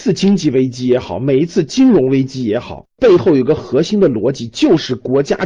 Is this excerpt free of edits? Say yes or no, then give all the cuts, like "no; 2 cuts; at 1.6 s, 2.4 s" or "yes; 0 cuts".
no; 1 cut; at 2.9 s